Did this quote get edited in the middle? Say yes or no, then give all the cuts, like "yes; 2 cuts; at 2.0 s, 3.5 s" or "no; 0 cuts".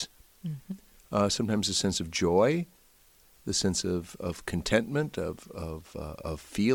no; 0 cuts